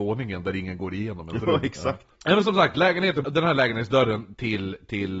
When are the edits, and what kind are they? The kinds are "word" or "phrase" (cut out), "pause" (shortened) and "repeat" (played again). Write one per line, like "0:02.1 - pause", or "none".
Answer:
0:02.1 - pause
0:03.2 - word

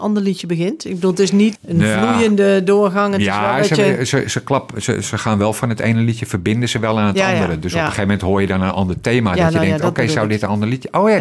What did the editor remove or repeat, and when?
0:01.6 - word

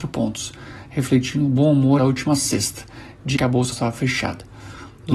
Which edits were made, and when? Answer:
0:02.0 - word
0:03.3 - word
0:03.7 - word

